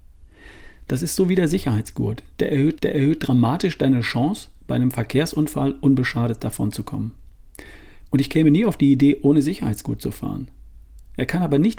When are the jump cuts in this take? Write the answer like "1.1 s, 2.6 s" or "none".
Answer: 2.8 s